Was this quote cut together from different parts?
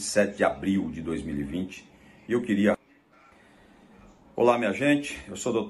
no; 0 cuts

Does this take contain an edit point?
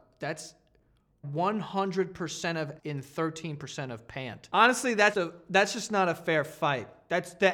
yes; 3 cuts; at 1.2 s, 2.8 s, 5.1 s

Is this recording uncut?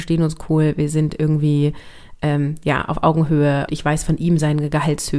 no; 1 cut; at 3.7 s

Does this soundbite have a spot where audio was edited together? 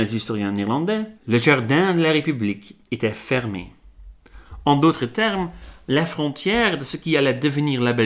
yes; 1 cut; at 1.2 s

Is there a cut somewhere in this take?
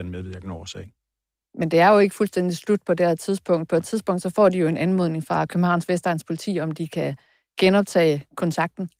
no; 0 cuts

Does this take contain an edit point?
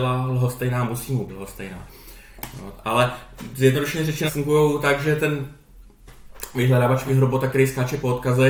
yes; 3 cuts; at 1.3 s, 4.3 s, 7.1 s

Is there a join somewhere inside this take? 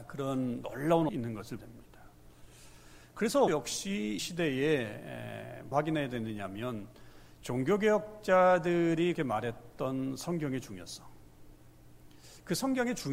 yes; 6 cuts; at 1.1 s, 1.6 s, 3.5 s, 4.2 s, 5.7 s, 9.1 s

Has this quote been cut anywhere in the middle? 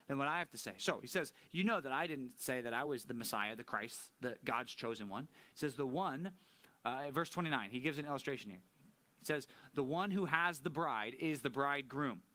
no; 0 cuts

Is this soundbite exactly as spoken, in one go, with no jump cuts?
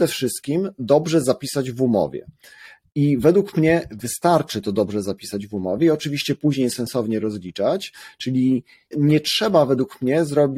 no; 1 cut; at 8.9 s

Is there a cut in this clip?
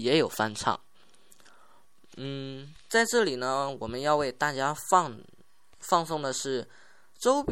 no; 0 cuts

